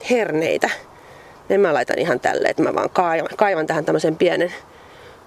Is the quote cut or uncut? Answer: uncut